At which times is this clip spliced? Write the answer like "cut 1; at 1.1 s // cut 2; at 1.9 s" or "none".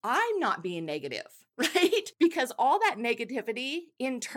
cut 1; at 1.5 s